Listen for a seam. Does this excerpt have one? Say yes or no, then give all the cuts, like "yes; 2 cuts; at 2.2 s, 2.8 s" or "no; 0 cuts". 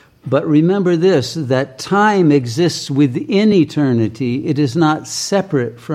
no; 0 cuts